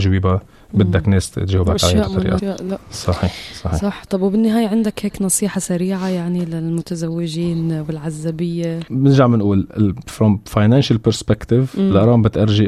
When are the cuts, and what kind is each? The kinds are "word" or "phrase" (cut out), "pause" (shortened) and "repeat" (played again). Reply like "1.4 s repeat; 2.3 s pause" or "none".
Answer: 2.4 s word

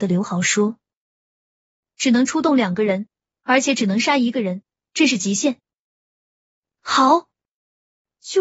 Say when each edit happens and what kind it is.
none

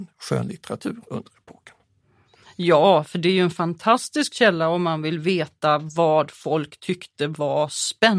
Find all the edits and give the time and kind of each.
none

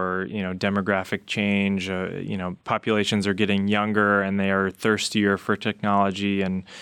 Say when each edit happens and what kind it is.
2.6 s pause

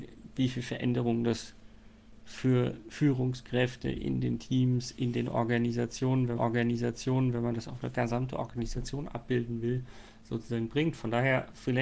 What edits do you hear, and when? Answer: 6.4 s repeat

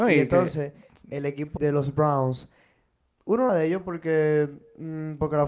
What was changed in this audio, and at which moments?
1.6 s word; 3.5 s word

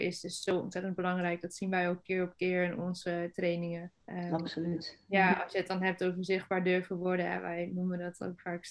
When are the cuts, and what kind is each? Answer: 4.0 s pause

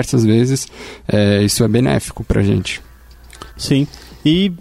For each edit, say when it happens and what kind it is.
3.5 s pause

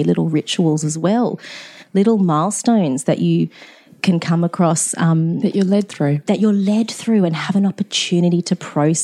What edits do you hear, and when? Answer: none

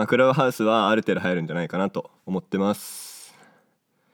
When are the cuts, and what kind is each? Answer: 2.2 s pause

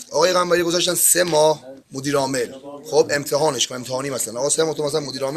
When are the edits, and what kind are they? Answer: 1.8 s pause

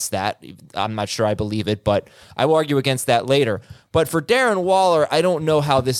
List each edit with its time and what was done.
none

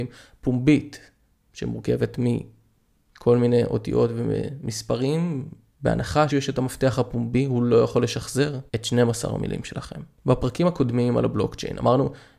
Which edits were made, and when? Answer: 6.3 s word; 8.7 s pause

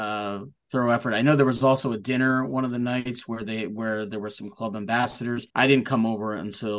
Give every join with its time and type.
5.5 s pause

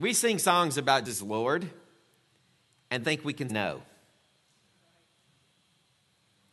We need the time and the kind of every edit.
1.1 s word; 3.0 s word; 3.5 s word

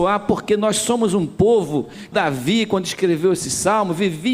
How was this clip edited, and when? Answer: 2.1 s word

